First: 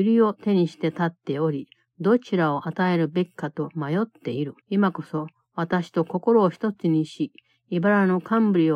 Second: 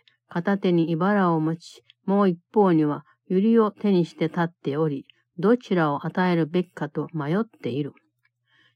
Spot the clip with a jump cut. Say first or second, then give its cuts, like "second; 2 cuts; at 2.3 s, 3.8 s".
first; 1 cut; at 4.6 s